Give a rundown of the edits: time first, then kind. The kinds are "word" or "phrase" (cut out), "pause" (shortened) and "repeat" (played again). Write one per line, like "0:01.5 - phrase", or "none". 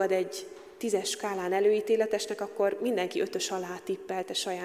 none